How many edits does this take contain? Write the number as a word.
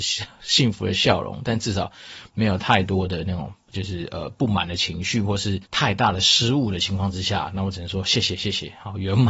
one